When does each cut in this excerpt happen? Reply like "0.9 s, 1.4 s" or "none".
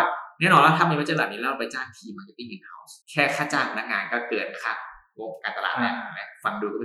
3.0 s